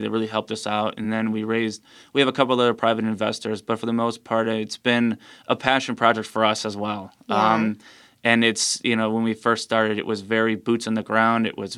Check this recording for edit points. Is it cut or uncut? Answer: uncut